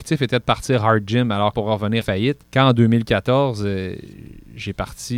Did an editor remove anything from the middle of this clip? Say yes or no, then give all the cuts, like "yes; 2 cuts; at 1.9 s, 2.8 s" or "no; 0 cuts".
yes; 3 cuts; at 1.5 s, 2.0 s, 2.4 s